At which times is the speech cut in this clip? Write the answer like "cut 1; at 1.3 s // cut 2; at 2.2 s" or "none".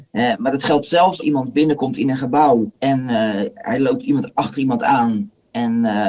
cut 1; at 1.2 s // cut 2; at 2.8 s

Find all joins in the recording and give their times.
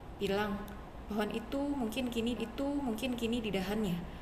cut 1; at 2.4 s

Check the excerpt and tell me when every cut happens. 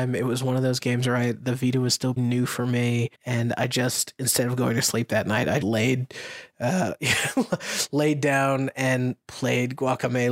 cut 1; at 2.2 s // cut 2; at 3.1 s // cut 3; at 5.6 s

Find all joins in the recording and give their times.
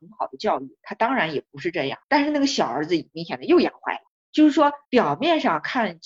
cut 1; at 2.0 s // cut 2; at 4.1 s // cut 3; at 4.8 s

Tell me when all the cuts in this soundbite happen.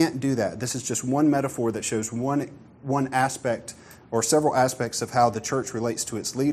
none

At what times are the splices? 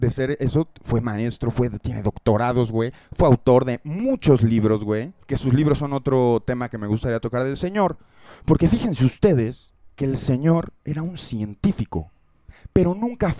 cut 1; at 5.2 s // cut 2; at 9.9 s

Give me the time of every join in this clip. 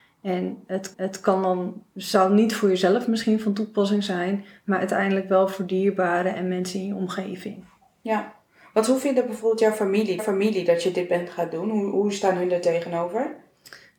cut 1; at 0.9 s // cut 2; at 10.2 s

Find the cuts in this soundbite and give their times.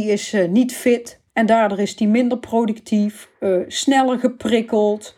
cut 1; at 1.3 s // cut 2; at 3.3 s

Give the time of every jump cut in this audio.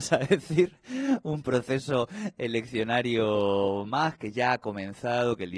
none

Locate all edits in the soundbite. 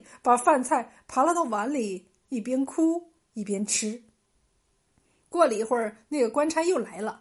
cut 1; at 4.9 s

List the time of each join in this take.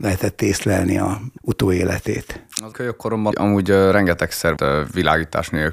cut 1; at 1.4 s // cut 2; at 2.7 s // cut 3; at 3.3 s // cut 4; at 4.6 s

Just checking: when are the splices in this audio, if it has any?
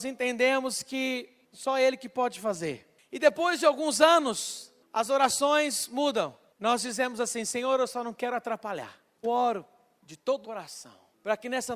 cut 1; at 9.2 s // cut 2; at 10.4 s

